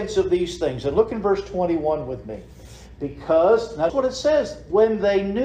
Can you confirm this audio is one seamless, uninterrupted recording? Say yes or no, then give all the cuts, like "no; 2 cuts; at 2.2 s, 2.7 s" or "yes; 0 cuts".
no; 1 cut; at 3.9 s